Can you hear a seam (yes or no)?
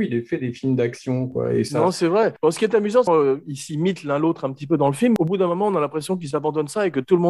yes